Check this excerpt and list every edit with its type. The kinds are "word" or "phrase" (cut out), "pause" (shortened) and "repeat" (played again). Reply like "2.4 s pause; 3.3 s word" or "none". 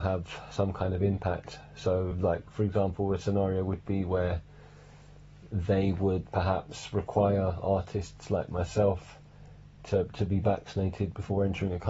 none